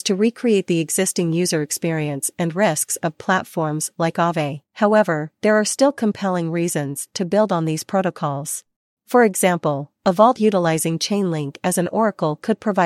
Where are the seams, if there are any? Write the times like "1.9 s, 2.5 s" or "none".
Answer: 4.7 s, 8.9 s